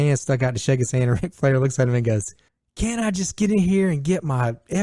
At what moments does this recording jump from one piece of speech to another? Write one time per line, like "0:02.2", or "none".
0:02.5